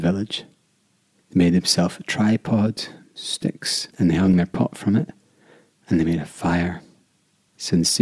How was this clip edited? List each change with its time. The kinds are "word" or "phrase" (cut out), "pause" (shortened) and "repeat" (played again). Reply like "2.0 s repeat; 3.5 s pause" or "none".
3.9 s pause